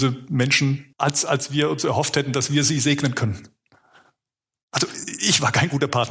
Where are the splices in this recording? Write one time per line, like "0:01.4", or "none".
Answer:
0:00.9